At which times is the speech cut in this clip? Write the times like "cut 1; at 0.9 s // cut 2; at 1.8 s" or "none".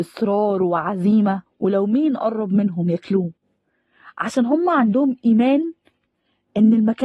cut 1; at 1.5 s